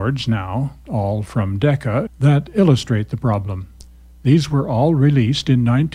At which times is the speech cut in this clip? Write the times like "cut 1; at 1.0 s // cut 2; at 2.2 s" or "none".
cut 1; at 2.1 s